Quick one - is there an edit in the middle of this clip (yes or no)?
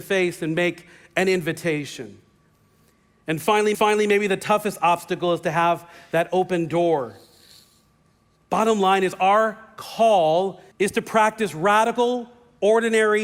yes